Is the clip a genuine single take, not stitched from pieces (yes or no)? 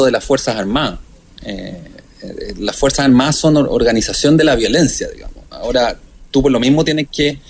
yes